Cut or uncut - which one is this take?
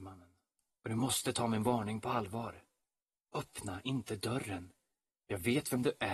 uncut